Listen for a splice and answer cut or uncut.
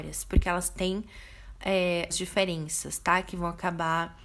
cut